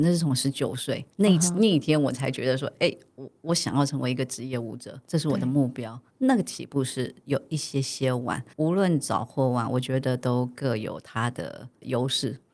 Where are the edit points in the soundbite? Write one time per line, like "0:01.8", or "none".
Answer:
0:01.1
0:05.0
0:06.1
0:08.5